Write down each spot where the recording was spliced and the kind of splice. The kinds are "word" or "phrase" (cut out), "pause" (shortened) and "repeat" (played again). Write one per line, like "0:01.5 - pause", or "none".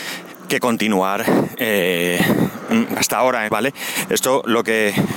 0:03.0 - word
0:03.5 - phrase